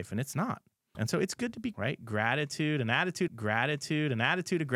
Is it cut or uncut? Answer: cut